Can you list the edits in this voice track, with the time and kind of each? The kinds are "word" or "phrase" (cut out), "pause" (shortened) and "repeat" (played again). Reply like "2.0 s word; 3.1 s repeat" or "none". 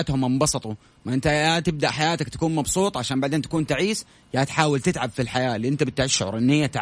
none